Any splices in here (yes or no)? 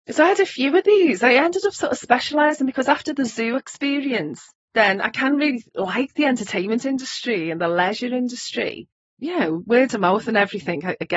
yes